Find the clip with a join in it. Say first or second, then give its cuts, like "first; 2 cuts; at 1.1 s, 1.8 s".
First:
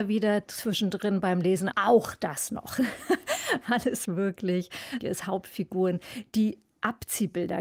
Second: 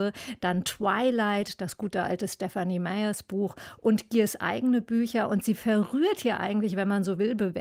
first; 3 cuts; at 1.7 s, 4.1 s, 5.0 s